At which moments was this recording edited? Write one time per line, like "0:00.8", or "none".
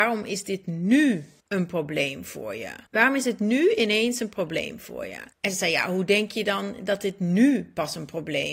0:01.4
0:02.9
0:05.3